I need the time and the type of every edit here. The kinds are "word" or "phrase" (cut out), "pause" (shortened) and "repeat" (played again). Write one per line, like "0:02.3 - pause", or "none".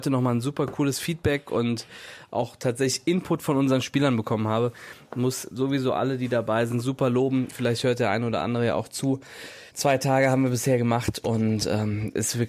0:09.7 - pause

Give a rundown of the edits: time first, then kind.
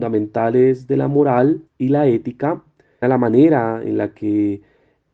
0:01.7 - pause
0:03.0 - phrase

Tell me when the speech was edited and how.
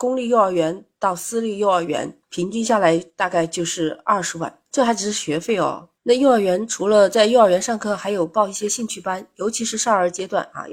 0:02.2 - pause
0:04.7 - pause
0:06.0 - pause

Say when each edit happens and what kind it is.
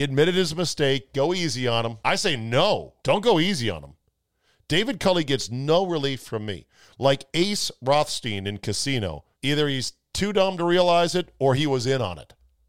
0:02.0 - pause
0:03.0 - pause
0:09.3 - pause

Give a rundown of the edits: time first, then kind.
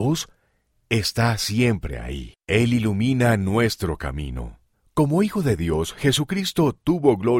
0:02.4 - pause
0:04.7 - pause

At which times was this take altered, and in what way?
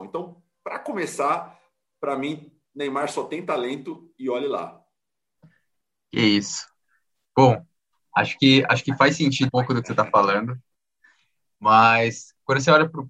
0:09.5 - word

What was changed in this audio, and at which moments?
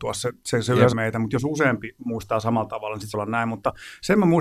0:00.9 - word
0:03.1 - word

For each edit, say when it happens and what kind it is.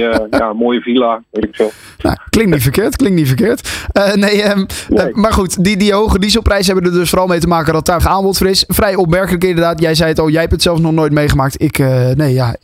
0:08.0 - word

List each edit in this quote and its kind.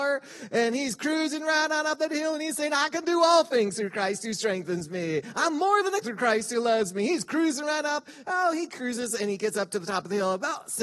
0:06.0 - word

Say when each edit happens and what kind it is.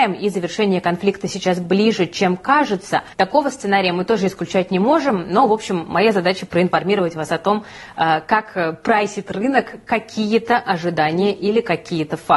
0:03.1 - pause

